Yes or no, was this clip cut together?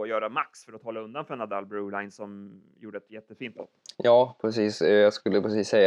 no